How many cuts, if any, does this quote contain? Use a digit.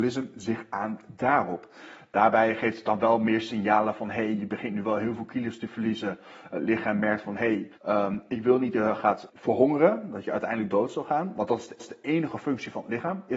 4